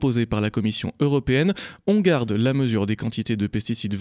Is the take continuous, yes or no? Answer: yes